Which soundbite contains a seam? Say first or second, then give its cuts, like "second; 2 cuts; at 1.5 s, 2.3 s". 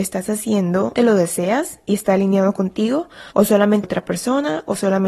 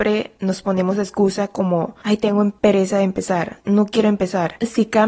first; 3 cuts; at 0.9 s, 3.3 s, 3.8 s